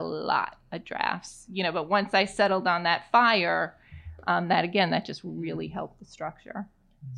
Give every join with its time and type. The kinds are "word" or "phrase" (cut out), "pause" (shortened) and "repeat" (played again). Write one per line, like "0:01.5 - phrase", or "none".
none